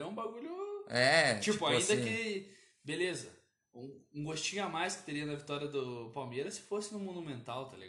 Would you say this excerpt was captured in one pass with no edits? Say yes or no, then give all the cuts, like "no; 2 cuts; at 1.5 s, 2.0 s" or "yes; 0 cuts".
yes; 0 cuts